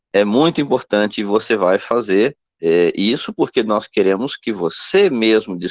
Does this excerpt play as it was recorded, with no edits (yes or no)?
yes